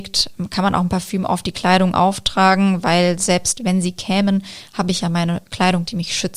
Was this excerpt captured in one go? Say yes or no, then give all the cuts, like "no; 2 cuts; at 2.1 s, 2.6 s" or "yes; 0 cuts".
yes; 0 cuts